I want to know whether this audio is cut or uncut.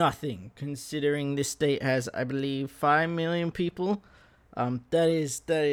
uncut